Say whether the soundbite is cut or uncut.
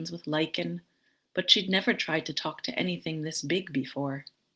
uncut